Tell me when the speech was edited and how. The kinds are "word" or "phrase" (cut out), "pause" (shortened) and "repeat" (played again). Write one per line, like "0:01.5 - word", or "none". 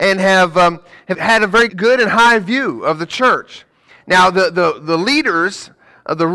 0:01.1 - word
0:01.7 - word